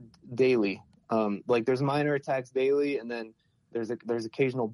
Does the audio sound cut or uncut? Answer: uncut